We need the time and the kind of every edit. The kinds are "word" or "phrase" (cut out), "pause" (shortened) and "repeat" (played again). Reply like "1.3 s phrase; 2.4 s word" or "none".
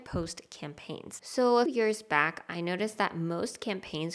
1.7 s word